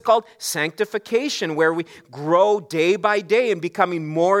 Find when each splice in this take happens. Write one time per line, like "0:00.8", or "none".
none